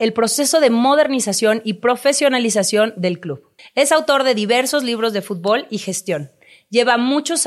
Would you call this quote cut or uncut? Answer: cut